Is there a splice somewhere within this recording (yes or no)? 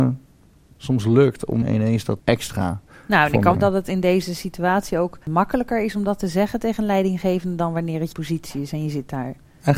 yes